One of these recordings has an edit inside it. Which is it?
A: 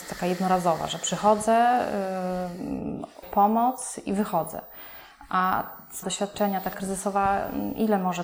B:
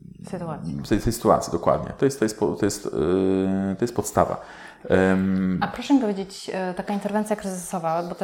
A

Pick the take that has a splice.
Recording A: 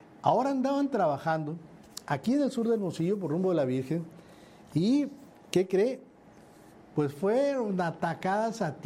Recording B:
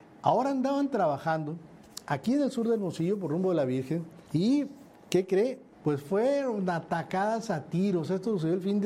B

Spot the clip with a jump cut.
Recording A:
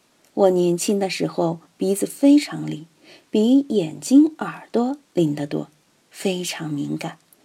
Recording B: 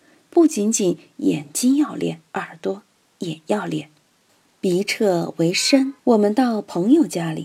B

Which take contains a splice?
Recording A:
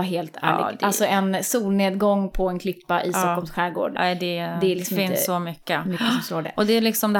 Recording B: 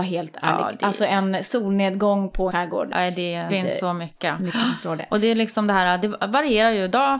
B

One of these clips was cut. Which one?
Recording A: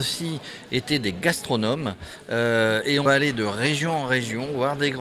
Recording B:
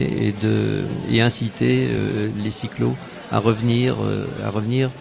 A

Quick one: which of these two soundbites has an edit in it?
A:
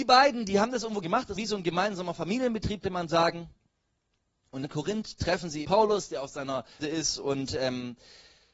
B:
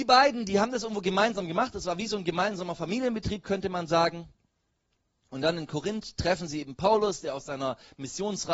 A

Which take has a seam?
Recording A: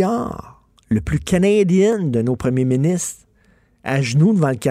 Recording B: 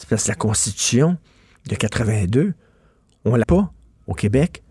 B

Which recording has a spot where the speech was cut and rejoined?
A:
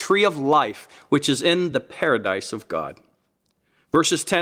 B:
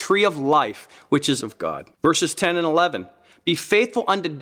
B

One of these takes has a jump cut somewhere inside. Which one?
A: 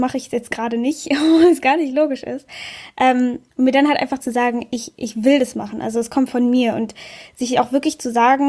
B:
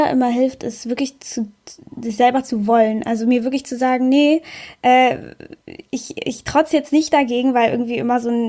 A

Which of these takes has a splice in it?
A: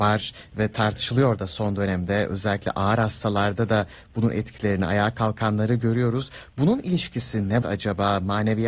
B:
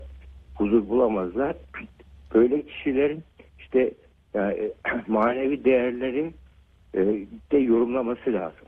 A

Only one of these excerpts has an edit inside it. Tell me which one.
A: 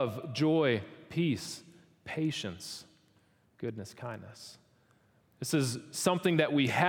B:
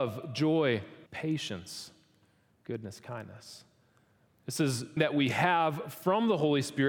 B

